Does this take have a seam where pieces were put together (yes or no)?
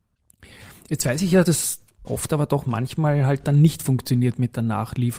yes